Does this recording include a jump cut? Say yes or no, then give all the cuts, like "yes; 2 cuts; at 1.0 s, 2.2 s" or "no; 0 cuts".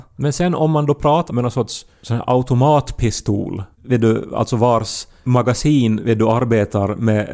yes; 2 cuts; at 1.3 s, 3.7 s